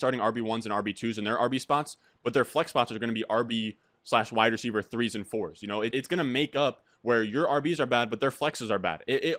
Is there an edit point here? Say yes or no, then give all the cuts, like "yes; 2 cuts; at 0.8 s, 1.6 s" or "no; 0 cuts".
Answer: yes; 1 cut; at 5.9 s